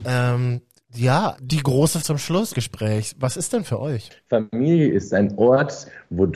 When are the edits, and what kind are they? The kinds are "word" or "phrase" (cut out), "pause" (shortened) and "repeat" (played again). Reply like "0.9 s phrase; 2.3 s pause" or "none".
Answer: 1.3 s word; 2.0 s word; 2.5 s word; 3.6 s word